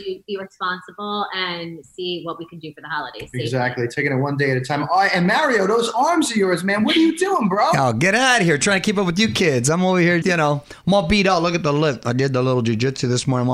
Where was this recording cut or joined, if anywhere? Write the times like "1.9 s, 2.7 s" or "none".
10.2 s

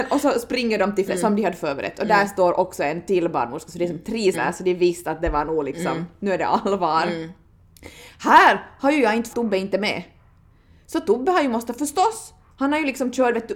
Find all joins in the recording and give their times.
1.1 s, 4.3 s, 9.3 s

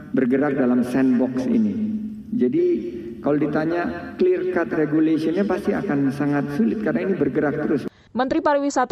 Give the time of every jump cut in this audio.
none

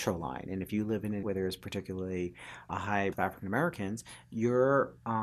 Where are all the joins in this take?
1.2 s, 2.7 s, 3.1 s

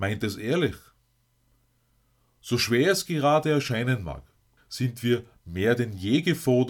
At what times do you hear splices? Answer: 4.6 s

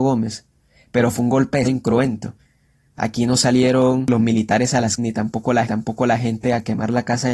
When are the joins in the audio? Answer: 1.6 s, 5.0 s, 5.7 s

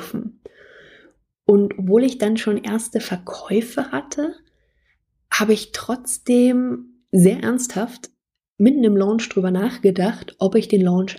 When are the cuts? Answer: none

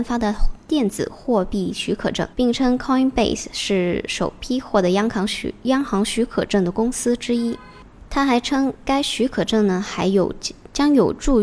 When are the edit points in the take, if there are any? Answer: 2.3 s, 8.1 s

